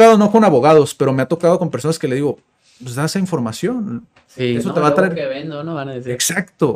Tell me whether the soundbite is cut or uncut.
uncut